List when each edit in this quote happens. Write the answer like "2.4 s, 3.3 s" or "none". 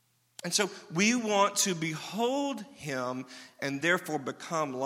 none